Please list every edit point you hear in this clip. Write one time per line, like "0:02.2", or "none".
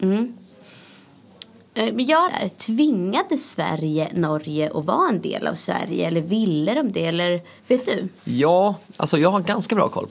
0:02.3
0:07.6
0:08.2